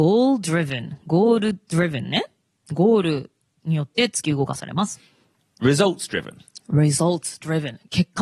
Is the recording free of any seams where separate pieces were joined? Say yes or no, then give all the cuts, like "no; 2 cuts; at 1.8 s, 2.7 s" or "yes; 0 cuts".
yes; 0 cuts